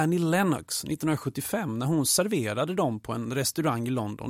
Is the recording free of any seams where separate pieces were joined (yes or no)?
yes